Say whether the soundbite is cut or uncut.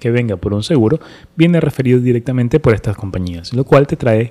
uncut